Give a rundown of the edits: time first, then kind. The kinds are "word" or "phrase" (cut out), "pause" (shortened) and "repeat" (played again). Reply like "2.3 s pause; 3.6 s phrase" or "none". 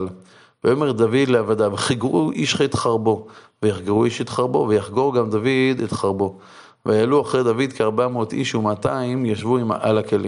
none